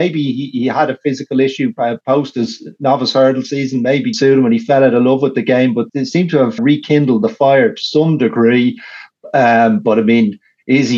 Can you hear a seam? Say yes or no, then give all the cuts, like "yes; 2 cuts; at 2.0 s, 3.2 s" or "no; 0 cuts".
yes; 4 cuts; at 2.0 s, 4.1 s, 5.9 s, 6.6 s